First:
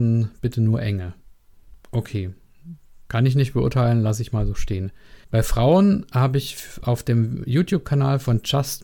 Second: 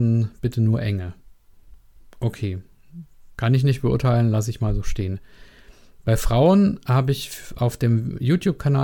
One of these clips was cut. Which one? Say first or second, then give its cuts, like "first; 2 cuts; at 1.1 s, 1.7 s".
first; 2 cuts; at 1.8 s, 5.2 s